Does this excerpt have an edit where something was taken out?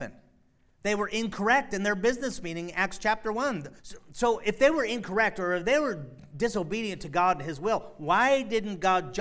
yes; 1 cut; at 3.8 s

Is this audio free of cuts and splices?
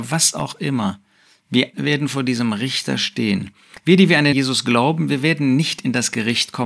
no; 2 cuts; at 1.7 s, 4.3 s

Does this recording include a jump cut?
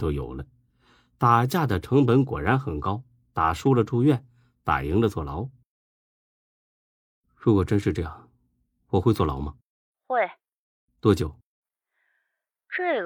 no; 0 cuts

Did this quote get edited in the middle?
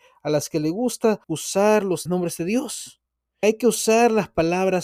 yes; 3 cuts; at 1.2 s, 2.1 s, 3.4 s

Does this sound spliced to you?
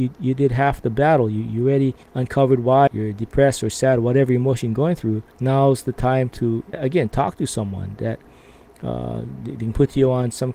yes; 4 cuts; at 2.0 s, 2.9 s, 5.3 s, 6.7 s

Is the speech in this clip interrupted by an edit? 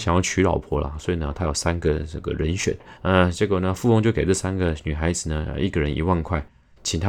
yes; 1 cut; at 3.0 s

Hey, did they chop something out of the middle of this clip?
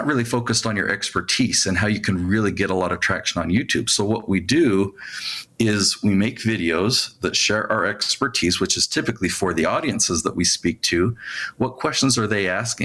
no; 0 cuts

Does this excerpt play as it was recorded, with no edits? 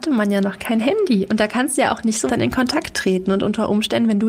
no; 1 cut; at 2.3 s

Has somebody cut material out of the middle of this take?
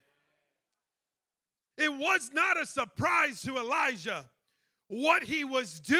no; 0 cuts

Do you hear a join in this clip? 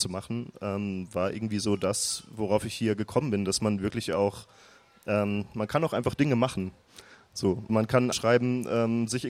yes; 2 cuts; at 7.7 s, 8.1 s

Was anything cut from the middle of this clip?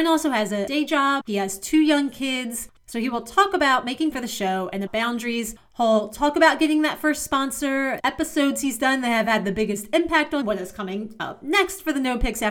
yes; 5 cuts; at 1.2 s, 4.1 s, 4.9 s, 8.0 s, 10.4 s

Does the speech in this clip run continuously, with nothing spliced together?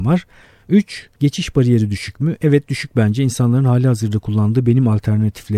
no; 1 cut; at 1.1 s

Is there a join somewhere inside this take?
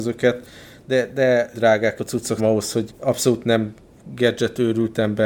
yes; 4 cuts; at 1.5 s, 2.0 s, 2.4 s, 2.9 s

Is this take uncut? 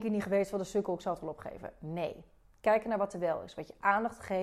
yes; 0 cuts

